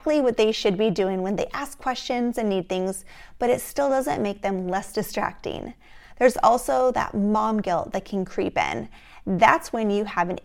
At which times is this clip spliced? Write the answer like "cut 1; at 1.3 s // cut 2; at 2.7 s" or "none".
none

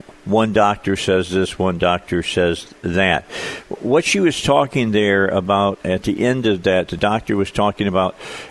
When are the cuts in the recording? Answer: cut 1; at 5.8 s // cut 2; at 6.9 s

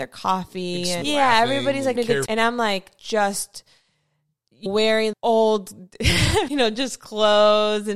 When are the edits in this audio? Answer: cut 1; at 1.0 s // cut 2; at 2.0 s // cut 3; at 2.3 s // cut 4; at 4.7 s // cut 5; at 5.1 s // cut 6; at 6.5 s

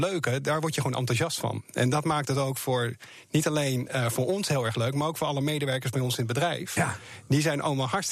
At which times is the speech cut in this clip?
none

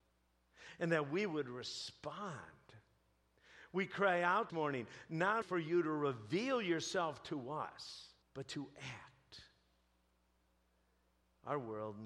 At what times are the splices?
cut 1; at 4.5 s // cut 2; at 5.4 s // cut 3; at 8.2 s

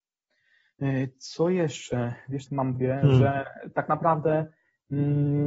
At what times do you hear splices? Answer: cut 1; at 2.5 s // cut 2; at 2.8 s

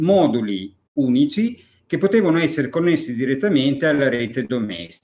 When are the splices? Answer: none

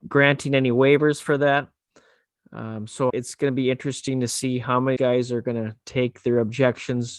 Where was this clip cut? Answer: cut 1; at 3.1 s // cut 2; at 5.0 s

